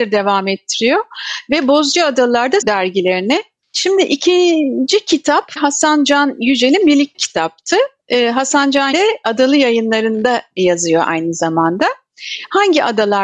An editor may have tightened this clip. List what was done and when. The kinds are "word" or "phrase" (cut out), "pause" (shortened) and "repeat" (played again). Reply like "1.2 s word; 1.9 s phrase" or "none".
2.6 s phrase; 5.6 s phrase; 7.1 s word; 8.9 s word